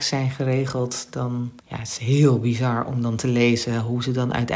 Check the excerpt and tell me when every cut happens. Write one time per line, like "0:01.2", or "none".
0:01.6